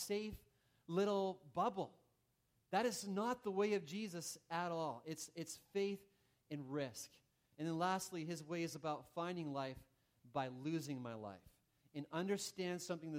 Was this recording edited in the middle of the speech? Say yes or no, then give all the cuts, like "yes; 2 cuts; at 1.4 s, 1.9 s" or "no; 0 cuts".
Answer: no; 0 cuts